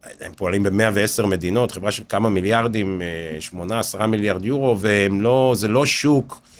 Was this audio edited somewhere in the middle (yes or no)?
no